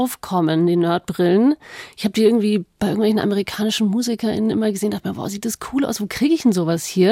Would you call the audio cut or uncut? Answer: uncut